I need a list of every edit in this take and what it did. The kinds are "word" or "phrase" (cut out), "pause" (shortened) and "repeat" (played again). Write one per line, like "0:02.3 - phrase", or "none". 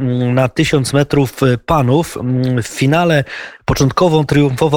none